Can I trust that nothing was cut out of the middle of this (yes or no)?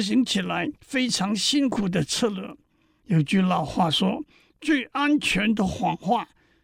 yes